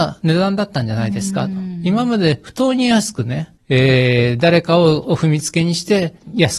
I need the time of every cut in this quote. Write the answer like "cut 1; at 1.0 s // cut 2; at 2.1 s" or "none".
cut 1; at 3.6 s